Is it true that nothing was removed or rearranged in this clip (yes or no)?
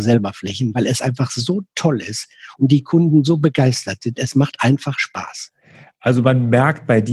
yes